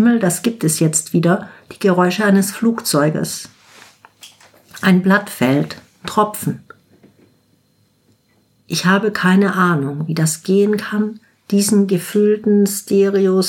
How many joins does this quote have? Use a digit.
0